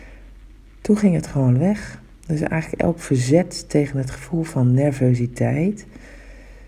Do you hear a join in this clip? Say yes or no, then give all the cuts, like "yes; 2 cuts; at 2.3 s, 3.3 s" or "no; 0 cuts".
no; 0 cuts